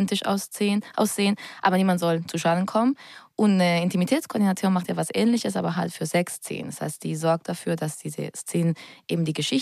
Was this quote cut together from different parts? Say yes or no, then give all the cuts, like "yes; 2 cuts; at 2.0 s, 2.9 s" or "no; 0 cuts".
no; 0 cuts